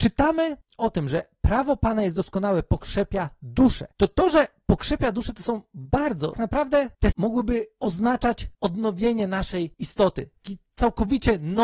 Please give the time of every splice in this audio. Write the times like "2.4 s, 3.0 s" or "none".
6.3 s, 7.1 s